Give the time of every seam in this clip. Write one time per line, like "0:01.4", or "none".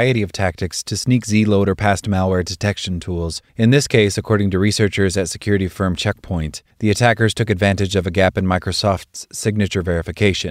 0:03.5
0:06.7

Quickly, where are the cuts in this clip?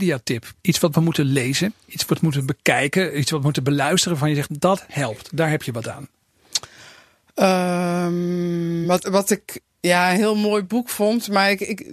none

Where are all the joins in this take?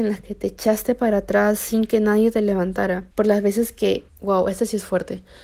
0:03.1
0:04.1

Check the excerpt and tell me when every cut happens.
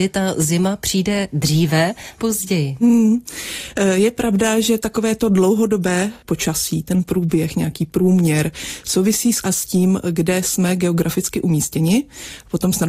0:02.2
0:09.4

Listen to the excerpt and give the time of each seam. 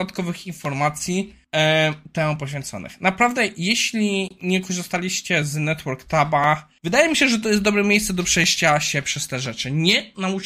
0:01.4
0:06.8

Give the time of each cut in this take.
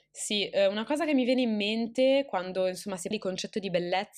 0:03.1

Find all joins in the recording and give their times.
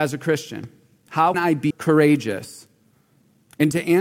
0:01.3
0:01.7

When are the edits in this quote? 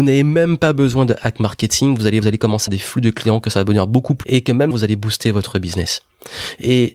0:02.2
0:02.7
0:04.2
0:04.7

